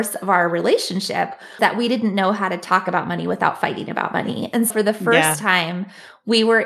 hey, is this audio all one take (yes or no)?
no